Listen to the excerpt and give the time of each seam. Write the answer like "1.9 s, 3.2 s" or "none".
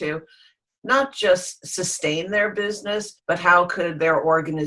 3.2 s